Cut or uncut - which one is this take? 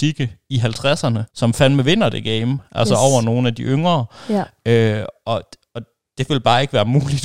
cut